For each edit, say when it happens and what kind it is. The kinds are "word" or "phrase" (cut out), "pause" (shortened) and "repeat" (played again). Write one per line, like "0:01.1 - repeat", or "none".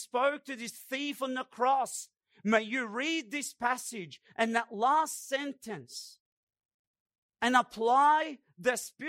none